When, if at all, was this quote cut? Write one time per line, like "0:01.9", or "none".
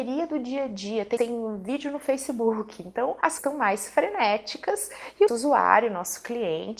0:01.2
0:03.4
0:05.3